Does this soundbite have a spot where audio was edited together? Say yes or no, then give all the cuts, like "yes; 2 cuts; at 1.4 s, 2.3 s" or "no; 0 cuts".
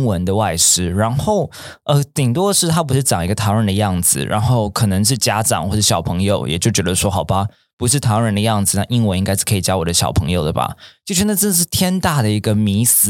no; 0 cuts